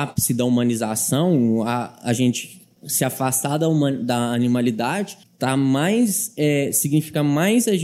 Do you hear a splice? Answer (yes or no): yes